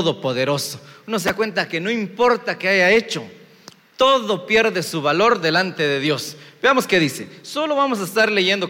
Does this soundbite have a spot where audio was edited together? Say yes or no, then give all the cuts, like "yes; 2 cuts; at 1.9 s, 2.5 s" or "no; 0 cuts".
no; 0 cuts